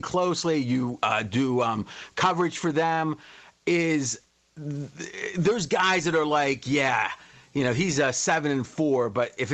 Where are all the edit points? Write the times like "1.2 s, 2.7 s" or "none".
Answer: none